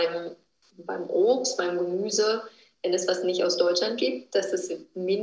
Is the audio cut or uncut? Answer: uncut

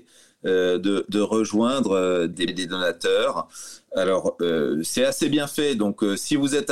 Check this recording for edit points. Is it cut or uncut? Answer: cut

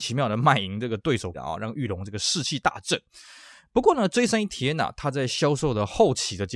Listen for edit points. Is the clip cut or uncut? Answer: cut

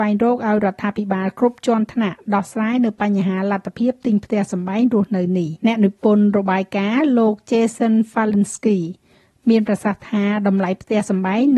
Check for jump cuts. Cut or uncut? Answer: cut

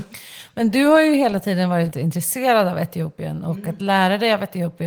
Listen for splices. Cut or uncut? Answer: cut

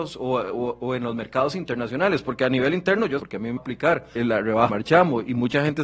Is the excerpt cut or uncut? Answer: cut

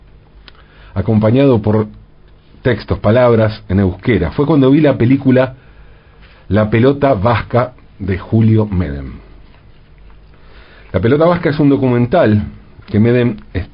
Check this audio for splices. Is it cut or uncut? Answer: uncut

